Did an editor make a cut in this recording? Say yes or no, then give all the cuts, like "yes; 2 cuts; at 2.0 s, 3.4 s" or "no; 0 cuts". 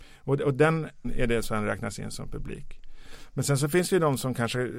yes; 2 cuts; at 1.0 s, 1.4 s